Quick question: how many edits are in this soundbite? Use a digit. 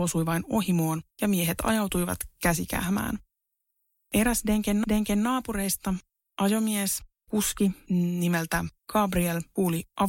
3